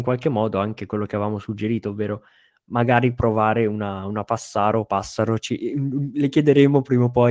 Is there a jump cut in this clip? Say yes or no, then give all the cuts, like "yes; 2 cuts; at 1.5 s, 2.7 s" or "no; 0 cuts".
no; 0 cuts